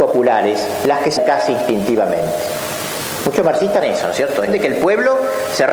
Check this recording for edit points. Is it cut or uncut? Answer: cut